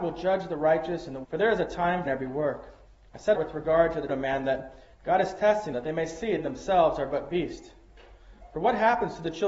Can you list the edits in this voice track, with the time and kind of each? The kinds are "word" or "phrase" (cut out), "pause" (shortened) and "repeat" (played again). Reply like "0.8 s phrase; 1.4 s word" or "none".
1.2 s word; 2.1 s phrase; 2.9 s pause; 3.3 s phrase; 4.1 s word; 4.9 s pause; 5.7 s word; 6.4 s phrase